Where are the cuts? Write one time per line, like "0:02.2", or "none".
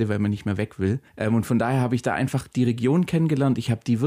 0:01.1

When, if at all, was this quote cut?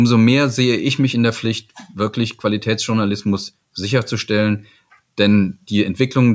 none

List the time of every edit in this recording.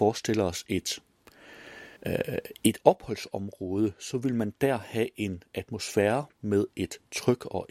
0:02.0
0:06.3

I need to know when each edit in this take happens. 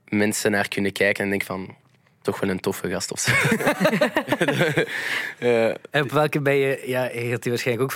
0:02.2

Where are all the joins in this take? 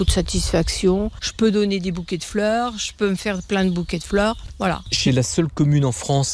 0:05.1

